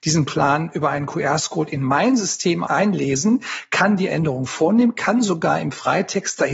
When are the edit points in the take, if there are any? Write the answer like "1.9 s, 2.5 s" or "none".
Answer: 2.7 s, 4.1 s